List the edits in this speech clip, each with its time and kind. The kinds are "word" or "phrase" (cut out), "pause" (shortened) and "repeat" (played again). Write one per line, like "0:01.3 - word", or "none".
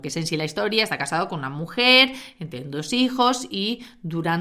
none